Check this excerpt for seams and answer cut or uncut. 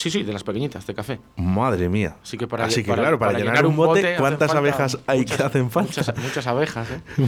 uncut